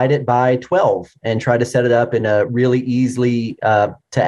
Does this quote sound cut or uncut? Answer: uncut